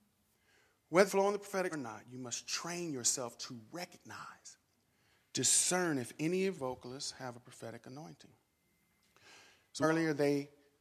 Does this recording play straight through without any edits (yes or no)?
no